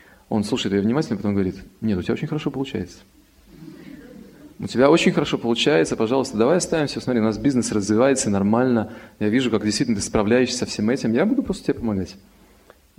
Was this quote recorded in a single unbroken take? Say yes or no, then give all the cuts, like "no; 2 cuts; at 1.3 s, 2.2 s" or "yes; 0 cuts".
no; 1 cut; at 4.5 s